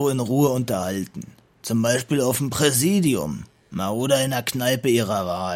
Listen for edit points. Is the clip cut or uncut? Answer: uncut